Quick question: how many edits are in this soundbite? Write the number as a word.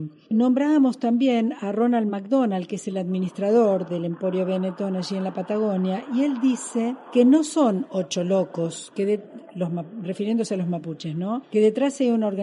zero